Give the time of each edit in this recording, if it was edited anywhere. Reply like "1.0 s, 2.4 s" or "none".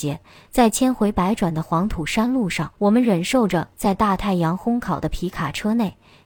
2.7 s